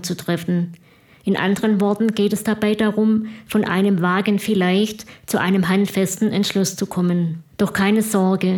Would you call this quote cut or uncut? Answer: cut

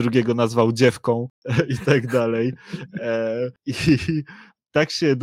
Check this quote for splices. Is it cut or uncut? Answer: uncut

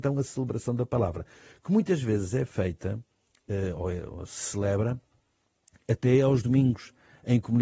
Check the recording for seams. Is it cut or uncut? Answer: uncut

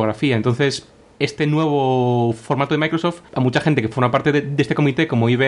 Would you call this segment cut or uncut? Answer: uncut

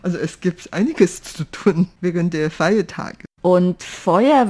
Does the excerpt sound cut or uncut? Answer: uncut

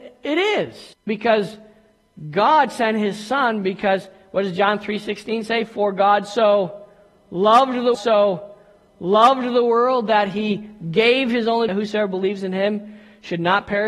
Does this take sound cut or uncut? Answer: cut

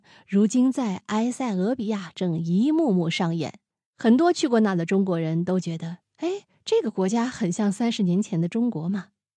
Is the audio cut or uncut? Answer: uncut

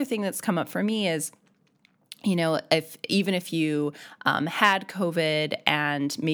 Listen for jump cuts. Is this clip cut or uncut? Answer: uncut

